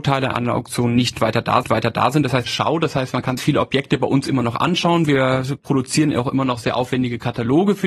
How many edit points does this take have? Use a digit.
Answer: 3